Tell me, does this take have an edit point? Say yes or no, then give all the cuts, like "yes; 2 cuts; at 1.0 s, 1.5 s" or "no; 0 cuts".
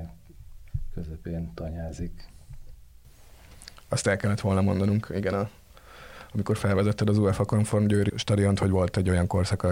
no; 0 cuts